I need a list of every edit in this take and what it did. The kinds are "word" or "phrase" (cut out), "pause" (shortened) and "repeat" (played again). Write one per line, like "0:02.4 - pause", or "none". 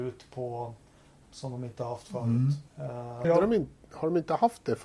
0:01.2 - word
0:02.7 - pause
0:03.2 - word